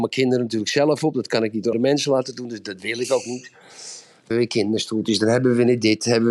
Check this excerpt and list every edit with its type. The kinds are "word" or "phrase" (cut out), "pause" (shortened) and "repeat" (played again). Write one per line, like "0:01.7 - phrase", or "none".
0:01.7 - word
0:04.3 - word